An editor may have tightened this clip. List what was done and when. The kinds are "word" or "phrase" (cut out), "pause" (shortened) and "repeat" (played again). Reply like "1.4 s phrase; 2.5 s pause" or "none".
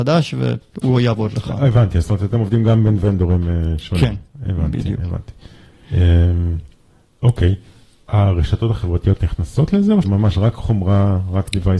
10.0 s word